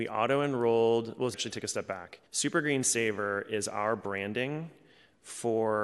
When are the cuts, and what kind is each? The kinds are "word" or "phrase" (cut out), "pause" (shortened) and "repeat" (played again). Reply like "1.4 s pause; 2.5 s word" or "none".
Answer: 1.3 s phrase; 2.3 s pause

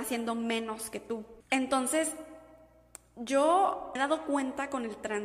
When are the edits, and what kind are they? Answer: 1.4 s pause; 4.0 s word

